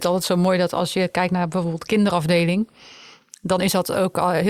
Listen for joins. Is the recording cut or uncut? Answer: uncut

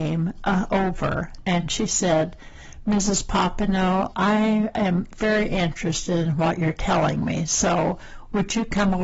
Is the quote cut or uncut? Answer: cut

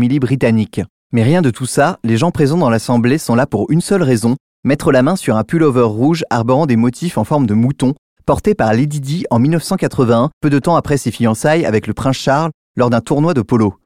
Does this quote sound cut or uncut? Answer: uncut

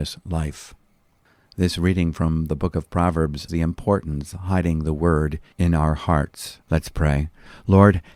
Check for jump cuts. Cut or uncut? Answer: cut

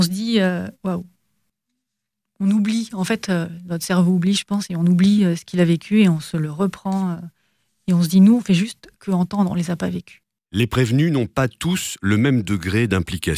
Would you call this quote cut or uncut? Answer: uncut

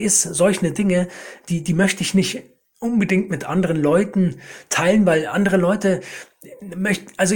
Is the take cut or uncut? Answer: uncut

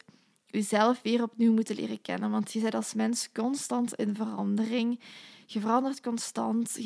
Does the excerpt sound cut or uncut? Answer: uncut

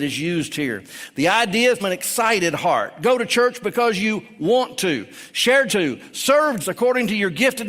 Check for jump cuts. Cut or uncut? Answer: cut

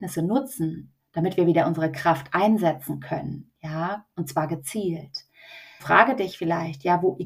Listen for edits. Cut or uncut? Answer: cut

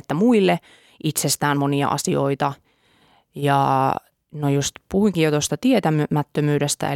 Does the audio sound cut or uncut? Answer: uncut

